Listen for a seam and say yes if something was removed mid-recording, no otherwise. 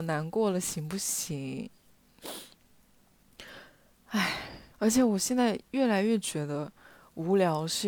yes